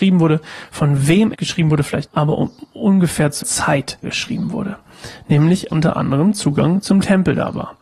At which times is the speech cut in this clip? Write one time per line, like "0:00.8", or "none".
0:01.3
0:02.1
0:03.4
0:04.0
0:05.7